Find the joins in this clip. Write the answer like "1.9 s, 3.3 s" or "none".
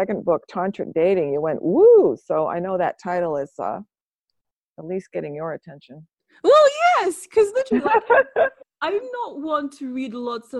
none